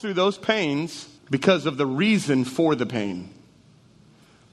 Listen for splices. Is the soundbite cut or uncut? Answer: cut